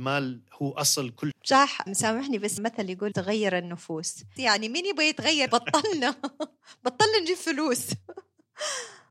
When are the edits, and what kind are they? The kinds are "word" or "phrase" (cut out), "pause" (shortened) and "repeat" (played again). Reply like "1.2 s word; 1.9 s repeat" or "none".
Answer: 1.3 s word; 1.9 s word; 2.6 s word; 3.1 s word; 4.4 s word; 5.5 s word